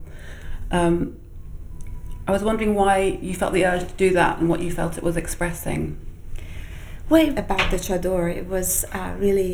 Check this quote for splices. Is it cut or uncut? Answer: cut